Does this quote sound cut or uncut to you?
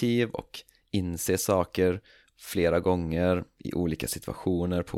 uncut